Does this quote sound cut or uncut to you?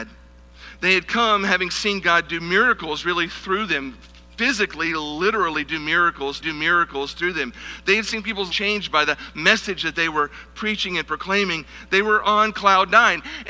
cut